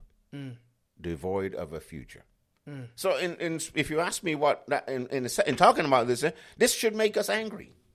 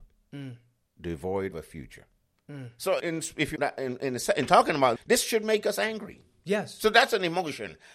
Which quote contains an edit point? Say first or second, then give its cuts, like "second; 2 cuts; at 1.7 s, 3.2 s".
second; 4 cuts; at 1.5 s, 3.0 s, 3.6 s, 5.0 s